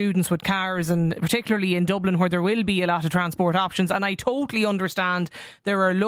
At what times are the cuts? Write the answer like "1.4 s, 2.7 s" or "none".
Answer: none